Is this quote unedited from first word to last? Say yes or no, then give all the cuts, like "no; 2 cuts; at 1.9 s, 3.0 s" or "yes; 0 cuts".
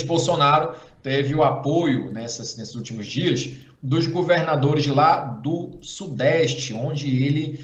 yes; 0 cuts